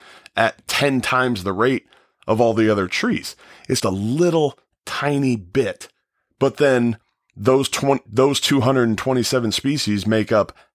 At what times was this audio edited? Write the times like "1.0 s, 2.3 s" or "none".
3.8 s